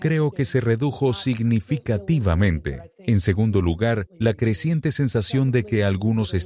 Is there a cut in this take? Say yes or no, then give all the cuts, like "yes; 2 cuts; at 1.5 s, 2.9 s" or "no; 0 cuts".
no; 0 cuts